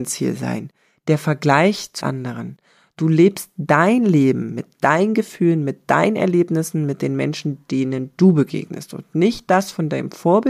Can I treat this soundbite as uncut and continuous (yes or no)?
no